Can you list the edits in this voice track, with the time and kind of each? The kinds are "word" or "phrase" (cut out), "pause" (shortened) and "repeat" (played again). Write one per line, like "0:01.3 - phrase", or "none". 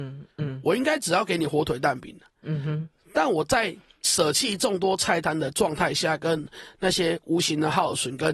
none